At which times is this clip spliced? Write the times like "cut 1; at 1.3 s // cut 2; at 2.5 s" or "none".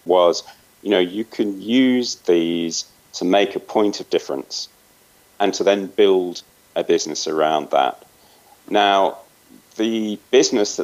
none